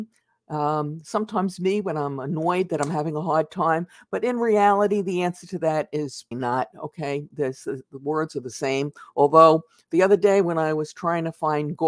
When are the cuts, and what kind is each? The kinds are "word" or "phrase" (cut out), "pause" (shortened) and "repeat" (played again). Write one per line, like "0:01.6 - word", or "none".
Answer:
0:06.3 - word